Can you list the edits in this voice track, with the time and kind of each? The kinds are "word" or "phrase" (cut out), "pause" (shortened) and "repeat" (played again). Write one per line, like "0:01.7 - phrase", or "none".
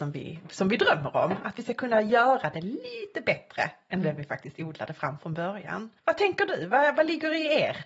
0:06.0 - pause

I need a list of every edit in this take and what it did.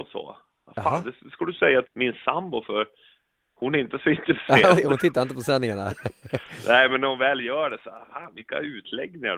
0:01.8 - word
0:04.7 - word

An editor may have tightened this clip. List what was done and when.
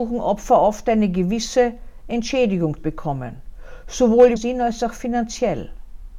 0:02.8 - word
0:04.4 - word

